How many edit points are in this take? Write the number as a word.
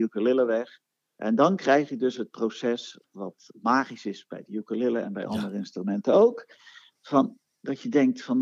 zero